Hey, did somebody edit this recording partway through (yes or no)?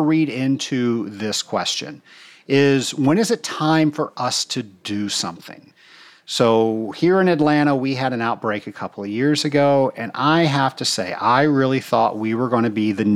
no